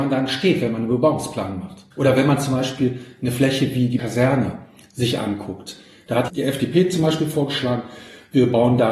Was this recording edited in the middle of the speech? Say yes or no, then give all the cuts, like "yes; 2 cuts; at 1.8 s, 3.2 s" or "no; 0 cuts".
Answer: yes; 3 cuts; at 1.9 s, 4.0 s, 6.3 s